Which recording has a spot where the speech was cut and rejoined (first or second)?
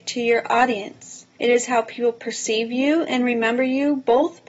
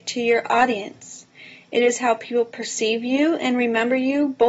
first